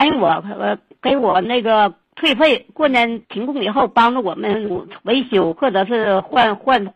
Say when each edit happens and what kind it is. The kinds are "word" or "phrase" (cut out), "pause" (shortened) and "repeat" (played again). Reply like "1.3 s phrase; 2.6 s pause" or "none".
2.0 s pause